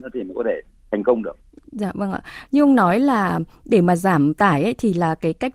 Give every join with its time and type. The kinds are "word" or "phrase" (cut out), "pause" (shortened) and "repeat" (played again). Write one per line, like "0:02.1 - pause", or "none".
none